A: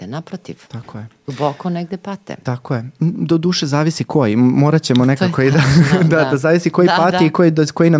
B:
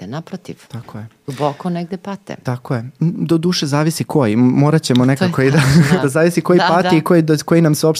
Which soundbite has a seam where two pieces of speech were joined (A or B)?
B